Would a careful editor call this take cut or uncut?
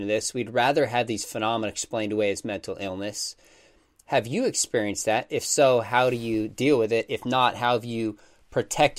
uncut